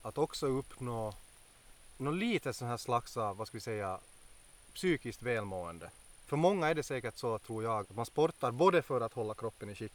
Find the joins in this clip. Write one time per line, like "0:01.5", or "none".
0:07.8